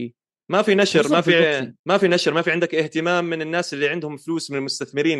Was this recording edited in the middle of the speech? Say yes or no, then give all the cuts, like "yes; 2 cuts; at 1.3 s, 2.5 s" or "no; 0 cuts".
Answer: yes; 1 cut; at 1.8 s